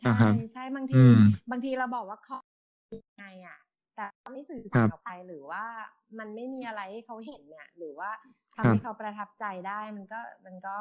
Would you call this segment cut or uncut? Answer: uncut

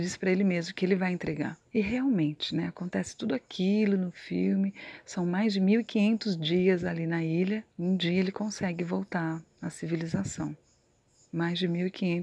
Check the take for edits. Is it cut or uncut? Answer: cut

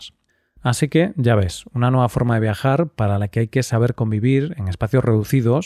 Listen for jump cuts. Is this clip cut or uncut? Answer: uncut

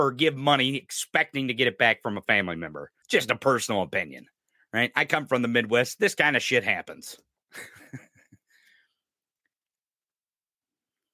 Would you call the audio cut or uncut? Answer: cut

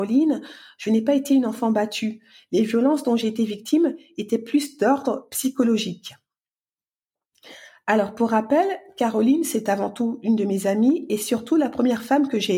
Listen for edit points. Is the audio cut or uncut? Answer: uncut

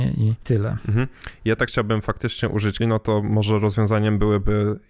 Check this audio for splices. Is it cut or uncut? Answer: cut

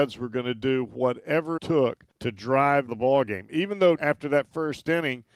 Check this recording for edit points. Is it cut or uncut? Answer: cut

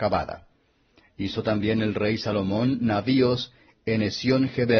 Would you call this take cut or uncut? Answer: uncut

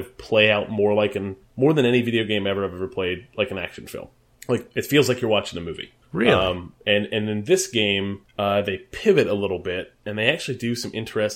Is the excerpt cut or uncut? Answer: cut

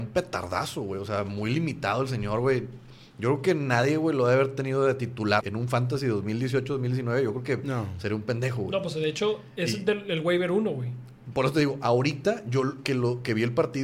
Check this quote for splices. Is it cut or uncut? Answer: cut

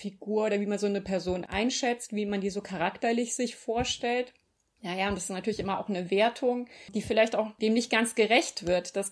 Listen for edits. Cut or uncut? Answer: uncut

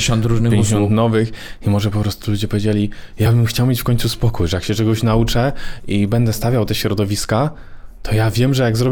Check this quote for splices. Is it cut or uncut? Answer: uncut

